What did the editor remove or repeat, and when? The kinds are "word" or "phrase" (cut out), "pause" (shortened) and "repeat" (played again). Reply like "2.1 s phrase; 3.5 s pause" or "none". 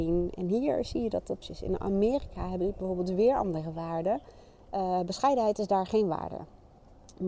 1.4 s phrase

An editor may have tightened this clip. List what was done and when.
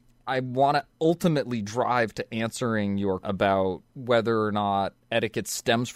3.2 s word; 3.9 s pause

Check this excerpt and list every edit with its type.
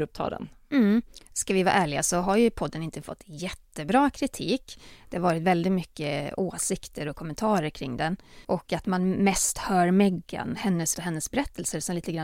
8.4 s pause; 10.9 s word

